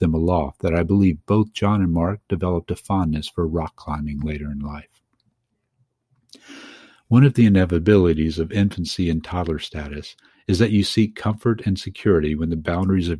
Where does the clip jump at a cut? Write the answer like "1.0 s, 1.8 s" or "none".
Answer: none